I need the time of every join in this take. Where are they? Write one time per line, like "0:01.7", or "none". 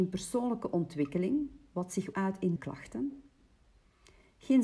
0:02.1
0:02.6

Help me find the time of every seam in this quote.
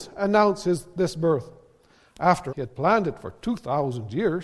0:02.5

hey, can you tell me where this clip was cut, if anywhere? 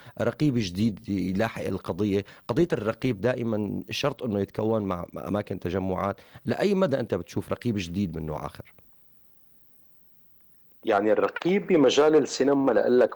none

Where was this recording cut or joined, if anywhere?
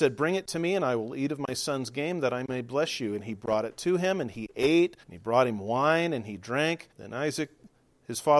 0:05.0
0:06.9

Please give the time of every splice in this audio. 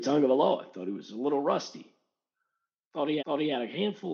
0:03.2

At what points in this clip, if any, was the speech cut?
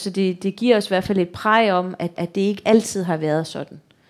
0:02.1

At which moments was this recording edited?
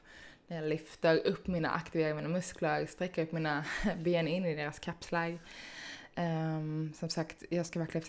none

